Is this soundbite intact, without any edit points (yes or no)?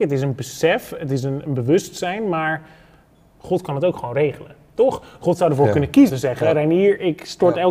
no